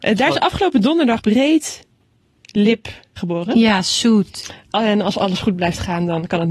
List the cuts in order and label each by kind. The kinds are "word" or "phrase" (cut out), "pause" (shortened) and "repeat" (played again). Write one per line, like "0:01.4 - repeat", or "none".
0:01.2 - word
0:03.2 - word